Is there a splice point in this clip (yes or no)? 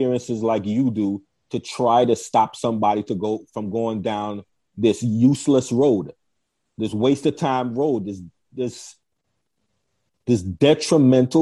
no